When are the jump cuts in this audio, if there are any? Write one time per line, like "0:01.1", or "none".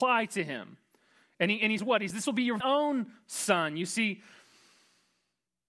0:01.8
0:02.1
0:02.6